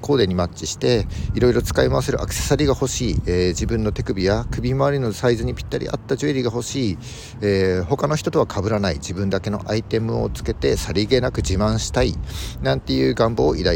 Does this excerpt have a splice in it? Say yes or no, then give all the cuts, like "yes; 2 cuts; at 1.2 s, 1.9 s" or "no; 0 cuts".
no; 0 cuts